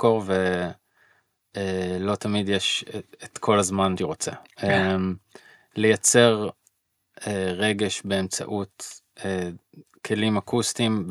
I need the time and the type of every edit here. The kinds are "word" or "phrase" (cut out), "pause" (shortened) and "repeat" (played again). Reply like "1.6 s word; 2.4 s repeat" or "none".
4.0 s word